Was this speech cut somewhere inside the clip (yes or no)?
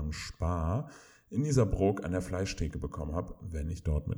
no